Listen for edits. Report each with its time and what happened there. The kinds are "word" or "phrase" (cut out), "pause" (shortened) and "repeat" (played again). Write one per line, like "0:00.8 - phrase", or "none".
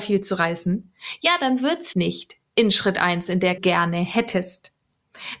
0:01.9 - word
0:03.6 - phrase